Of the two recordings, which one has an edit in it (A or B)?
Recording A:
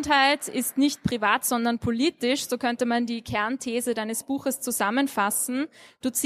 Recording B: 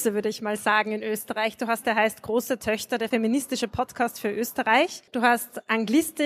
B